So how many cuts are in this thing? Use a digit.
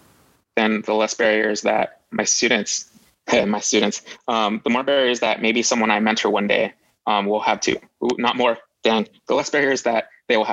0